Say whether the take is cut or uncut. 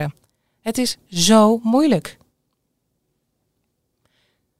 uncut